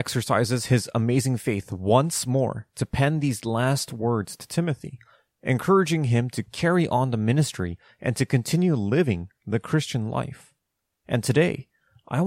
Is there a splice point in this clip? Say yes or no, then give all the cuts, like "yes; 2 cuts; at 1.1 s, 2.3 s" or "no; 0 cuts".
no; 0 cuts